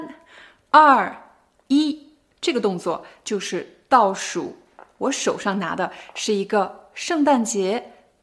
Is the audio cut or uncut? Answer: uncut